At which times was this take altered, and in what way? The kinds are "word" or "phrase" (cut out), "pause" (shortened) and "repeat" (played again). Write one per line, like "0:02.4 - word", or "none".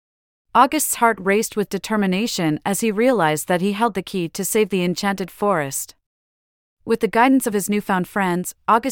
none